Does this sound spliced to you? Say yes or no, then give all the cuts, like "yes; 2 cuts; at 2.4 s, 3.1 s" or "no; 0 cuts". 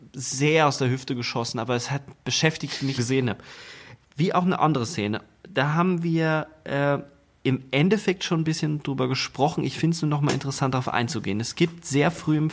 yes; 2 cuts; at 3.0 s, 4.0 s